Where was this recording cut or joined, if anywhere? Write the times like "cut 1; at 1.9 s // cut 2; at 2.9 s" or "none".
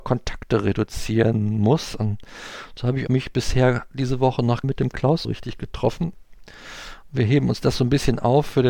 cut 1; at 3.1 s // cut 2; at 4.6 s // cut 3; at 5.2 s